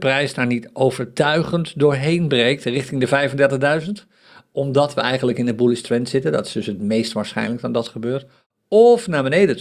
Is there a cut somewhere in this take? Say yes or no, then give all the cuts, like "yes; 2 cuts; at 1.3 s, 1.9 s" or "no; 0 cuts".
no; 0 cuts